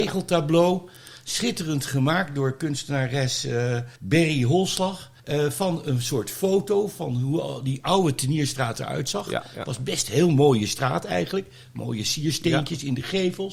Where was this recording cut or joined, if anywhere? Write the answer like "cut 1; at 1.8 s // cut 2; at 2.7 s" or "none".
cut 1; at 4.0 s // cut 2; at 5.2 s